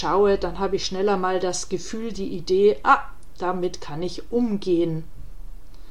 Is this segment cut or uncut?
uncut